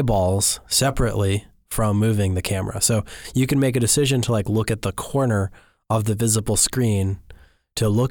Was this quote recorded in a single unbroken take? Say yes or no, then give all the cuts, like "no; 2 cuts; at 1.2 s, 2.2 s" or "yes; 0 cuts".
yes; 0 cuts